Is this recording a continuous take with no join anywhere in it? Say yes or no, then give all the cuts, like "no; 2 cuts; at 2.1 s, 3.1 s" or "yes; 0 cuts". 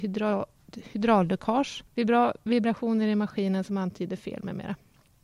no; 1 cut; at 1.9 s